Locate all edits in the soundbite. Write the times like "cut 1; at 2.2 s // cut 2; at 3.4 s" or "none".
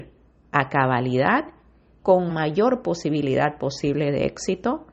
cut 1; at 2.0 s // cut 2; at 2.3 s